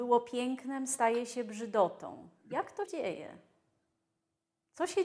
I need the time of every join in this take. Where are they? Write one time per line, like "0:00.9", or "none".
0:02.9